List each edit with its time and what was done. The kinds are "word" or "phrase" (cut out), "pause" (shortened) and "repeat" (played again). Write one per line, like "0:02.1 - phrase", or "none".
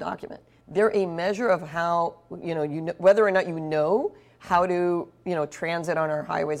none

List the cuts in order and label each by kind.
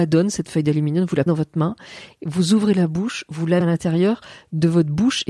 0:01.3 - word
0:03.6 - word

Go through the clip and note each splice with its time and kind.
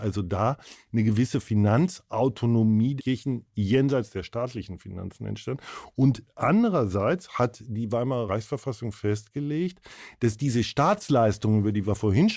0:03.0 - word

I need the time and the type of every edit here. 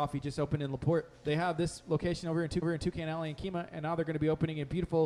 0:02.6 - repeat

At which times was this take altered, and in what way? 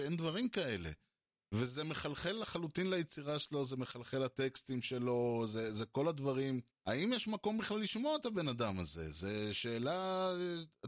0:06.7 - pause

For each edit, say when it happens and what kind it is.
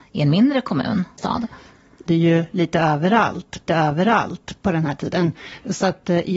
0:01.2 - phrase
0:02.1 - phrase
0:03.7 - repeat

